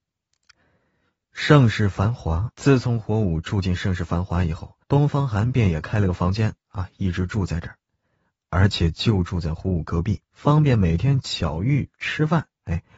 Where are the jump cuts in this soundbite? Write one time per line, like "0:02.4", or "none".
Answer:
0:02.5
0:04.8
0:10.2